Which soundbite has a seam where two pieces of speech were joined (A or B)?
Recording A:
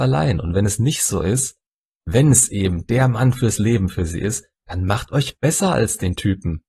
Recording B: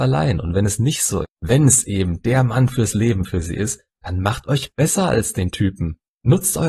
B